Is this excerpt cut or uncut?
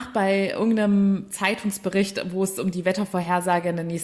uncut